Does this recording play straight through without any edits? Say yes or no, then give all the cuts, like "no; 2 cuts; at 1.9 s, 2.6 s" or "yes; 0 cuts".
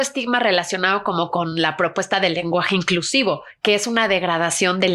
yes; 0 cuts